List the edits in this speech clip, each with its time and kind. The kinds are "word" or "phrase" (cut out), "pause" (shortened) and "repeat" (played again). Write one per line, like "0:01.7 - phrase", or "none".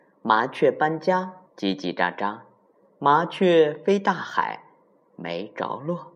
0:01.5 - pause